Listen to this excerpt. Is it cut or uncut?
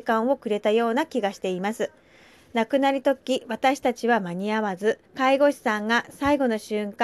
cut